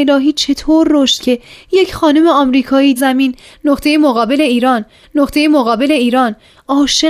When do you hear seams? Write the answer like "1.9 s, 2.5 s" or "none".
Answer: 1.2 s, 3.0 s, 5.0 s